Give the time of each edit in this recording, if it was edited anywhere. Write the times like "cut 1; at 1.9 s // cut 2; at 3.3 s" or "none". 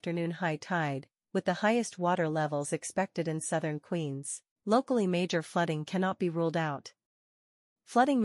cut 1; at 4.5 s